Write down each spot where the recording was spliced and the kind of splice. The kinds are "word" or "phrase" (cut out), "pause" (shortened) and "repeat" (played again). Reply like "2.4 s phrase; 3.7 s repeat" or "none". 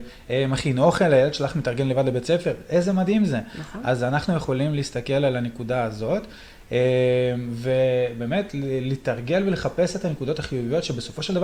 none